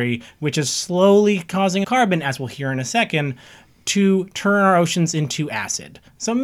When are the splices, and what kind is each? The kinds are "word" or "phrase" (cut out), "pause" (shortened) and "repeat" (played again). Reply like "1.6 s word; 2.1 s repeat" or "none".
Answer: 1.8 s word